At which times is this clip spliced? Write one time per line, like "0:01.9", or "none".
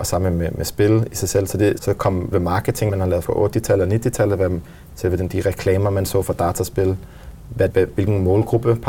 0:01.8
0:02.3
0:02.9
0:03.2
0:07.7